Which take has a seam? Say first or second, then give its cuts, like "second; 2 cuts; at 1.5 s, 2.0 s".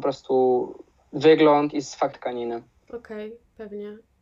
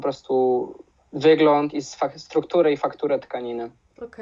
first; 1 cut; at 2.1 s